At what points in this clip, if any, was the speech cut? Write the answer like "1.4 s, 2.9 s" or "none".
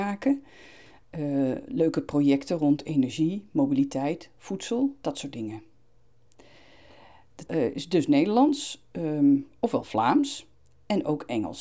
7.5 s